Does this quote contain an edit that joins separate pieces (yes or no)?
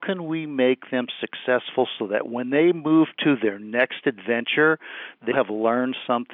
yes